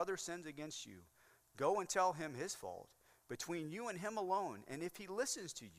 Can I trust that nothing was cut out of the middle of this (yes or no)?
yes